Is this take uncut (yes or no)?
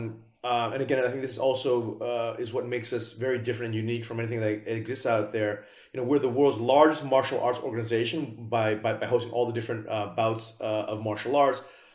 yes